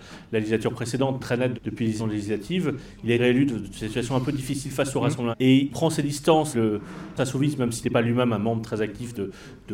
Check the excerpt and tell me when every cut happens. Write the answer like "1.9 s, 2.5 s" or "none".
1.2 s, 1.5 s, 2.0 s, 3.2 s, 5.3 s, 5.7 s, 6.5 s, 7.2 s, 7.8 s